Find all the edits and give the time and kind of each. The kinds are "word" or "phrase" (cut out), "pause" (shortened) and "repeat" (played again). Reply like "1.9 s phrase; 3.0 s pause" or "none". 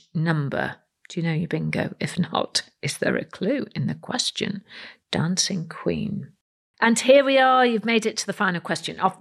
6.6 s pause